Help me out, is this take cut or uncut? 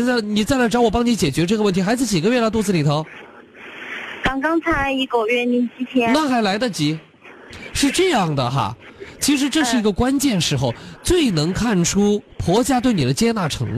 cut